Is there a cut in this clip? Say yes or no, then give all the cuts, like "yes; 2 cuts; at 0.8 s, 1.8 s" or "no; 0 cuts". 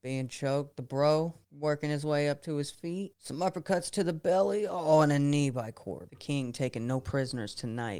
yes; 1 cut; at 1.4 s